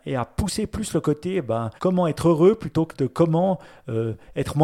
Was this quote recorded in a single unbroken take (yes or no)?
no